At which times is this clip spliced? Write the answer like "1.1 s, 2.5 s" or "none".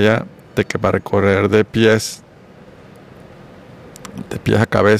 none